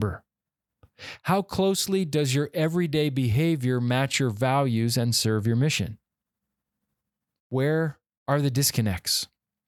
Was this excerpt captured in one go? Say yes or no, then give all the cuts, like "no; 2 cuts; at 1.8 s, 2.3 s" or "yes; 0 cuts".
yes; 0 cuts